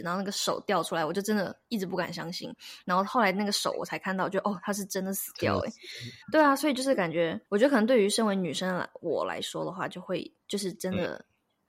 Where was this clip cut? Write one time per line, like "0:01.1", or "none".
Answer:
0:06.2
0:07.5
0:10.4